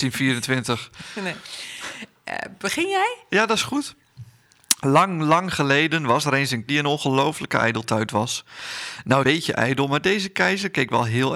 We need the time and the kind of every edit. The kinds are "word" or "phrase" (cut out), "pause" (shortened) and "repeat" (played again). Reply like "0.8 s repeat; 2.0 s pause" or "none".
6.7 s word; 9.2 s phrase